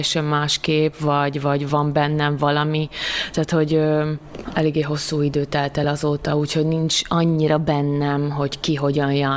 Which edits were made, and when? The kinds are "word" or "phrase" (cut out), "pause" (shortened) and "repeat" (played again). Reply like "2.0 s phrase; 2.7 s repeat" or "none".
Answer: none